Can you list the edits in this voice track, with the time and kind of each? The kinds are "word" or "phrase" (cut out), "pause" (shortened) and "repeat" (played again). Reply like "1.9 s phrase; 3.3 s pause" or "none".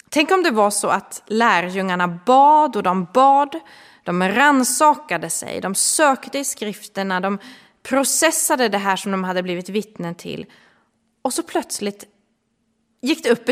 none